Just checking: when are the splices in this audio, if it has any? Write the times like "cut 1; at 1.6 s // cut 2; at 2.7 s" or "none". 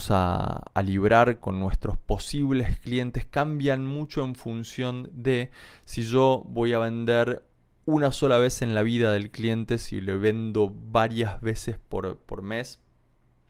cut 1; at 1.4 s